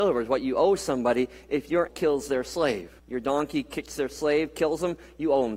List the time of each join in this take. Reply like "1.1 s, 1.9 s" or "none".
1.9 s, 3.0 s

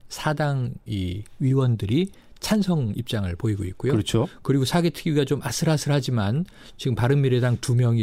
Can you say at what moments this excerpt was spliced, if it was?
none

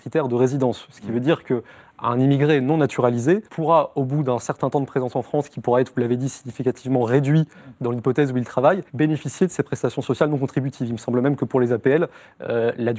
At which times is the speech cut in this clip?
3.5 s, 8.9 s

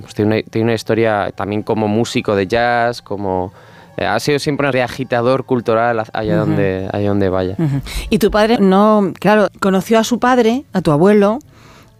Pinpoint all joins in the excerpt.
4.7 s, 8.6 s, 9.5 s

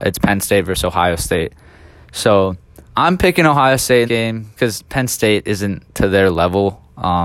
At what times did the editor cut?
2.9 s, 4.1 s, 4.6 s

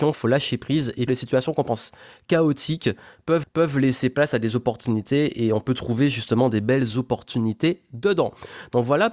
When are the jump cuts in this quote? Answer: 1.1 s, 3.4 s

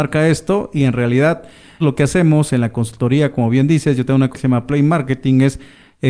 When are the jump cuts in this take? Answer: 1.8 s, 4.3 s

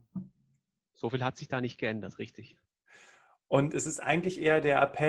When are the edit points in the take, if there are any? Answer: none

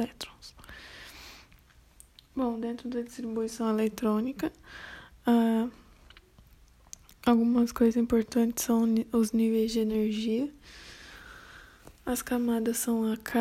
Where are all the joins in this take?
none

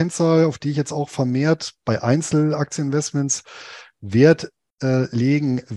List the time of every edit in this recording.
none

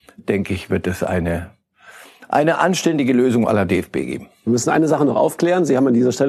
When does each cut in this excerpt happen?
none

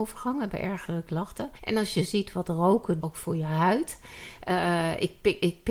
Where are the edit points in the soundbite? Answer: 1.6 s, 3.0 s

